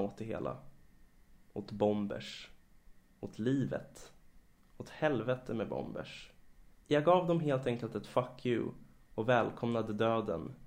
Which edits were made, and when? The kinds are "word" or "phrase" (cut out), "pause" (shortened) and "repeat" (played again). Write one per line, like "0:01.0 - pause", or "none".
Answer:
0:06.7 - pause